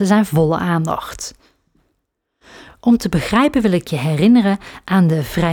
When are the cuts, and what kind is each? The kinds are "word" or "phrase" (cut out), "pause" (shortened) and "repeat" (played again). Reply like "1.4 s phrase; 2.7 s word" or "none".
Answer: none